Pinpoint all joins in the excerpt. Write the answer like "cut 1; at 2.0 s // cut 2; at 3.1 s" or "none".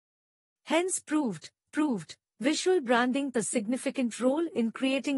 cut 1; at 1.7 s // cut 2; at 3.3 s